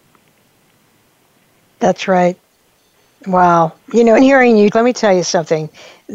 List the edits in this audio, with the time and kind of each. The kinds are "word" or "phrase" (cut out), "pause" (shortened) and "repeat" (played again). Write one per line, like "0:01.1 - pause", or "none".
0:03.8 - pause
0:04.2 - word
0:04.7 - word